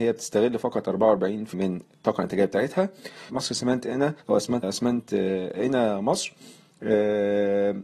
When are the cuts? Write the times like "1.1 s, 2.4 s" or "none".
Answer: 1.5 s, 3.3 s, 4.2 s, 4.6 s